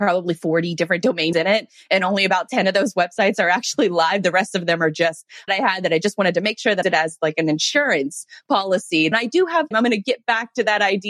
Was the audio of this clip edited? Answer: yes; 5 cuts; at 1.3 s, 5.5 s, 6.8 s, 9.1 s, 9.7 s

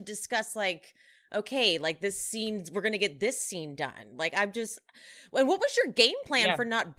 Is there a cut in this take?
no; 0 cuts

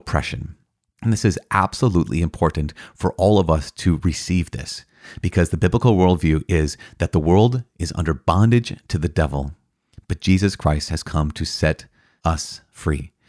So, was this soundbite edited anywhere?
no; 0 cuts

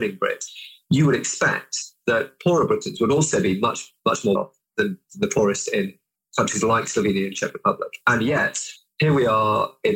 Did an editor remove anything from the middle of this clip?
yes; 1 cut; at 4.4 s

